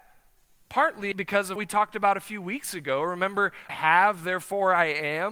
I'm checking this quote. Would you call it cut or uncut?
cut